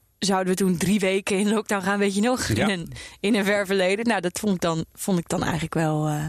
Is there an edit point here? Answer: no; 0 cuts

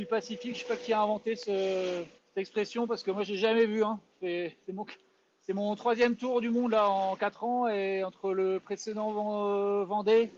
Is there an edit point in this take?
yes; 1 cut; at 2.2 s

